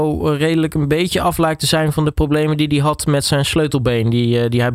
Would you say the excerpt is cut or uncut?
uncut